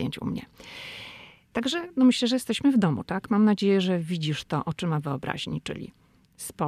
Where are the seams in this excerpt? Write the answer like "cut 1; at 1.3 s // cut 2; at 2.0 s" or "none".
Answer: none